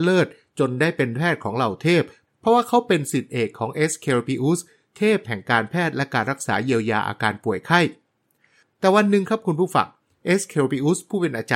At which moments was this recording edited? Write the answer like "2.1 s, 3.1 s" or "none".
none